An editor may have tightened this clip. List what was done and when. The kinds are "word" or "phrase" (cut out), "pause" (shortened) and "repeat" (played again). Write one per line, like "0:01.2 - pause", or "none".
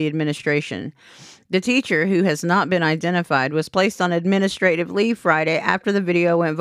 none

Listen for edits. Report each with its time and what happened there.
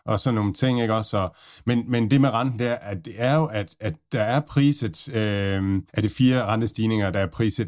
0:05.9 - pause

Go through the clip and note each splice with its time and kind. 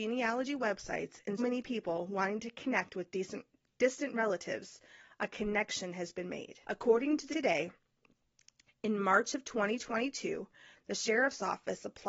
0:01.4 - word
0:06.6 - pause
0:07.3 - word

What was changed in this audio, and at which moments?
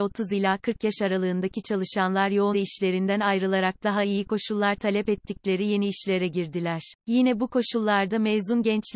0:02.5 - word
0:07.0 - pause

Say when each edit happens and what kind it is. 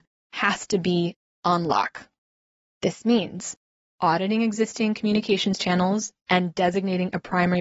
none

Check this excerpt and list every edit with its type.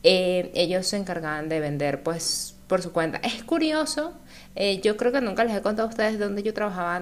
none

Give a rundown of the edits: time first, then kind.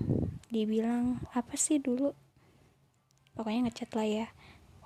none

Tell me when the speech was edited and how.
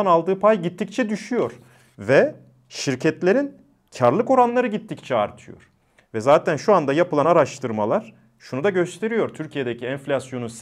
none

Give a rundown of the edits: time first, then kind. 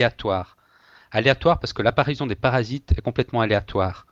none

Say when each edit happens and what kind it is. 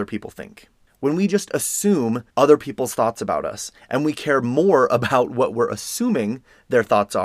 0:02.3 - pause

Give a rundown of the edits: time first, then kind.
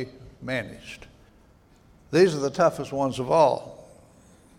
0:01.3 - pause

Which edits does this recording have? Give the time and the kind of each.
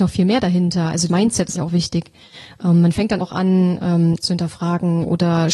0:01.1 - word
0:01.6 - word
0:03.2 - word
0:04.2 - word

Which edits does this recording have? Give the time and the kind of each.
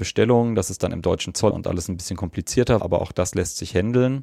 0:01.5 - word
0:02.8 - word

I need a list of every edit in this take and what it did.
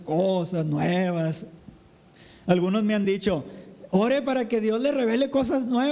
none

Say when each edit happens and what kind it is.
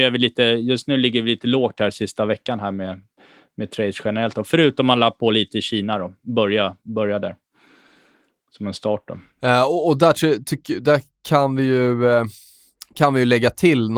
none

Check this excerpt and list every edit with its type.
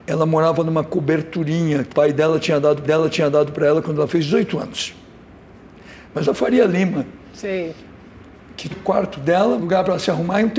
0:01.9 - word
0:02.8 - repeat
0:06.2 - phrase
0:08.7 - word
0:09.6 - phrase

